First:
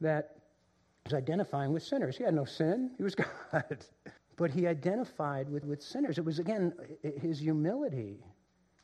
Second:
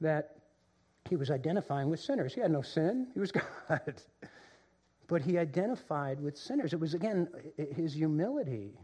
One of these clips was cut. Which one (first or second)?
first